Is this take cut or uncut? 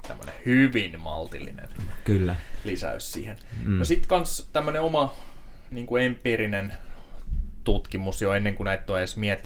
uncut